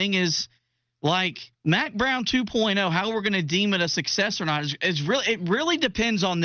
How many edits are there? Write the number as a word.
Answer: one